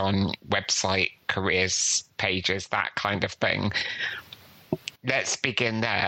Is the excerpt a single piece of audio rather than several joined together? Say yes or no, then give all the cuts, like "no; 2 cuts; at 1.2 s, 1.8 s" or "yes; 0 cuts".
no; 1 cut; at 5.0 s